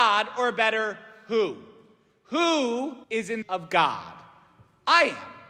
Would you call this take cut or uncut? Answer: cut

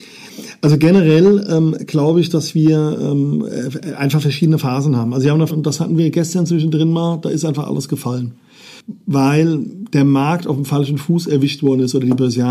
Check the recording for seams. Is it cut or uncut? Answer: cut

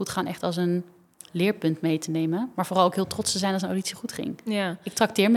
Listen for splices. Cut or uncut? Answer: uncut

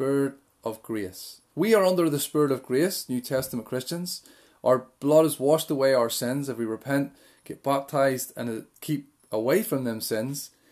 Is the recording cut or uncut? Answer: cut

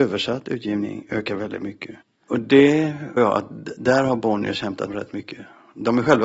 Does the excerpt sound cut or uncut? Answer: cut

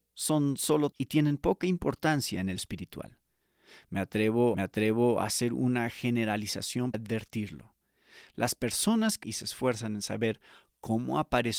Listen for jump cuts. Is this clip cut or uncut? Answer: cut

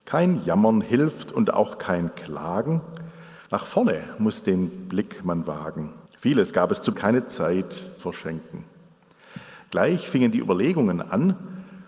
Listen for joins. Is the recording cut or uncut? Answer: cut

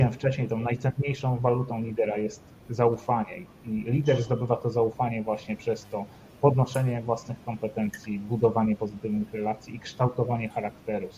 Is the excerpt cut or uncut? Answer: uncut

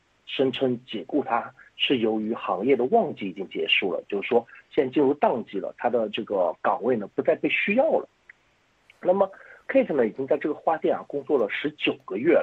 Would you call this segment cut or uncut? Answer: uncut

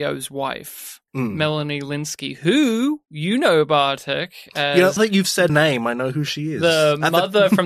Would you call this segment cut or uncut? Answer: cut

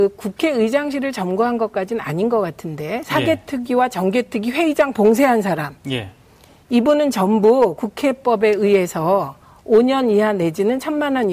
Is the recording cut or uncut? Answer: uncut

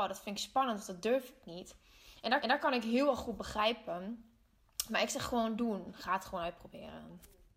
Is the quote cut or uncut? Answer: cut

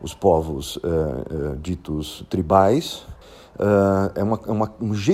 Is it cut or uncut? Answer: cut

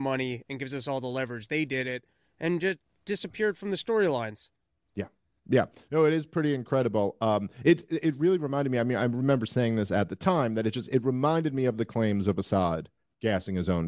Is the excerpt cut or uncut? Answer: uncut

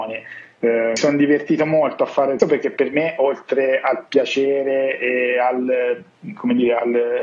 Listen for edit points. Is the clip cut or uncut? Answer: cut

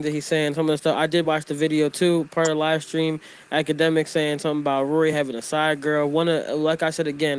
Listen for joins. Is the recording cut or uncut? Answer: uncut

